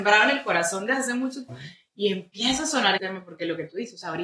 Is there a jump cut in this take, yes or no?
yes